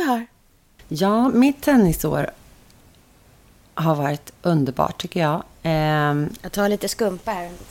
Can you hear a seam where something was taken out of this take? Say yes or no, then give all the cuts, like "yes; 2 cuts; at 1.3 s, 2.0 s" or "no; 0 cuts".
no; 0 cuts